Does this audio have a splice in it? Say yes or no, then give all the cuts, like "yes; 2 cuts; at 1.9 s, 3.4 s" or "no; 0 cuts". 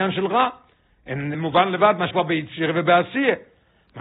yes; 2 cuts; at 1.3 s, 2.1 s